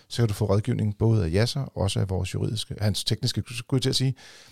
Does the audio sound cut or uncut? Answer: cut